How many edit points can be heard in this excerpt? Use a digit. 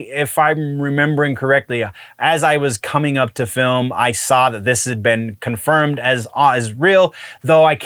0